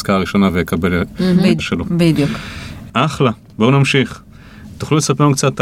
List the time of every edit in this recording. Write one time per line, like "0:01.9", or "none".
0:01.6